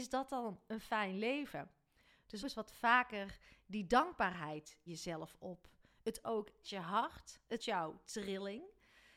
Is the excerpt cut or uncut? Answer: cut